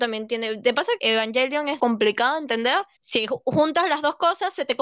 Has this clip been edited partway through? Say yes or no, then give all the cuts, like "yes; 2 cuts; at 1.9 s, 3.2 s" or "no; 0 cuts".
yes; 3 cuts; at 1.0 s, 1.8 s, 3.0 s